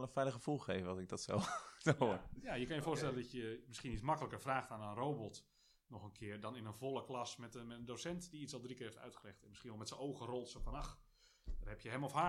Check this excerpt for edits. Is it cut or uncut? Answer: uncut